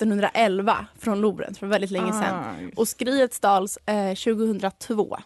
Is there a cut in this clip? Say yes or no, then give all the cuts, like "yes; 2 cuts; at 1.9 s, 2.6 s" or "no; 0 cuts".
no; 0 cuts